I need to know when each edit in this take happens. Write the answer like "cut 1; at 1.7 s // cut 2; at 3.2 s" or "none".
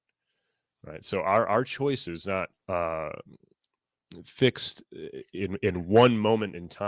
cut 1; at 2.6 s